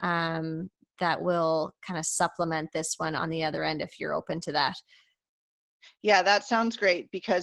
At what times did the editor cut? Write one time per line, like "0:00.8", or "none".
none